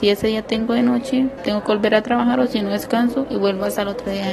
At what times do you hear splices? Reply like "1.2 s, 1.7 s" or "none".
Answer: 1.4 s